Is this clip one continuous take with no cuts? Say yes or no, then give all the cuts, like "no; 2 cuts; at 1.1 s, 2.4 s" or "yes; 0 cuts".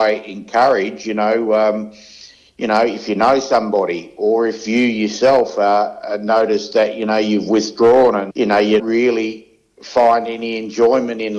no; 2 cuts; at 8.3 s, 8.8 s